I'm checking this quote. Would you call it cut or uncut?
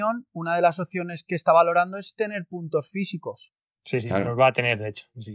uncut